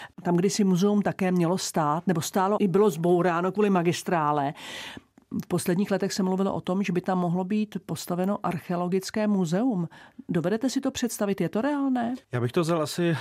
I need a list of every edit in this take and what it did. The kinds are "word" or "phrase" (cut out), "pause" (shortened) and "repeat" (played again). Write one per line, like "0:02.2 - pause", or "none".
0:02.6 - word
0:12.2 - pause